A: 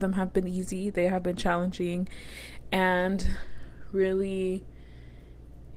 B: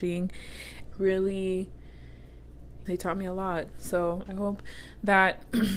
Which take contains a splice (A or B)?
B